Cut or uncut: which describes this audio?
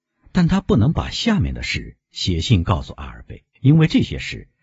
cut